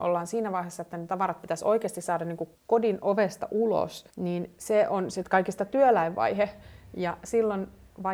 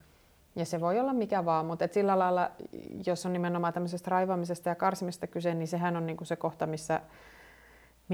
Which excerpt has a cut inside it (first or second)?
first